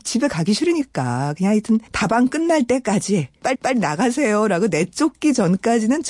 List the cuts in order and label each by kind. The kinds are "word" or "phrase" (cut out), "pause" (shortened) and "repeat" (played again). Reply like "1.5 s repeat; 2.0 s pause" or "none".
1.9 s pause; 3.5 s repeat